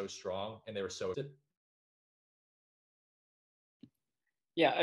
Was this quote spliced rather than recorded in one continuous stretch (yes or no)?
yes